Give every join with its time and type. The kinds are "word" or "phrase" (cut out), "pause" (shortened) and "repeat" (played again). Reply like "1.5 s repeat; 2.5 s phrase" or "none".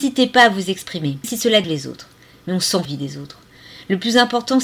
1.2 s word; 1.6 s word; 2.8 s phrase